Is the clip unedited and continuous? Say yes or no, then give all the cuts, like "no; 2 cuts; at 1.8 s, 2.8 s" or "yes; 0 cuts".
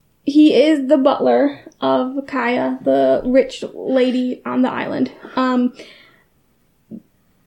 yes; 0 cuts